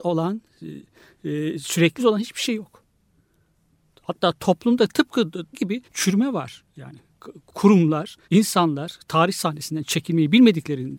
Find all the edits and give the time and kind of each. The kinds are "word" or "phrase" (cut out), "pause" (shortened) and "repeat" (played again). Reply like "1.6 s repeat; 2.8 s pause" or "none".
2.0 s phrase; 5.5 s phrase; 5.8 s pause; 8.2 s pause